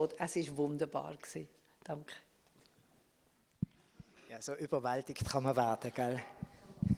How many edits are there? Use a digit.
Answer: 0